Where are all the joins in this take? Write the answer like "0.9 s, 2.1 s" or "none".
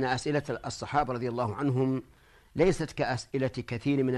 none